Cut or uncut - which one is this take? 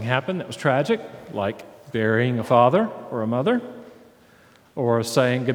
uncut